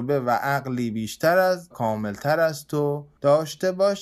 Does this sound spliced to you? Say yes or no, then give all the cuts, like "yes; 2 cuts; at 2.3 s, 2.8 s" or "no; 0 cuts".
yes; 1 cut; at 1.7 s